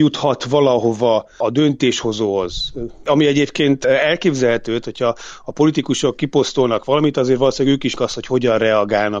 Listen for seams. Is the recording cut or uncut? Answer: cut